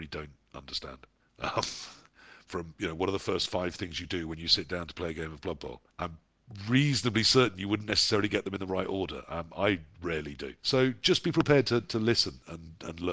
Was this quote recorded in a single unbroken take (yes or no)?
no